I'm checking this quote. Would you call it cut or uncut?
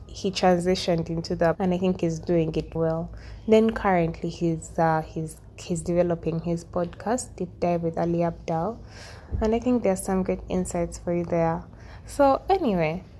cut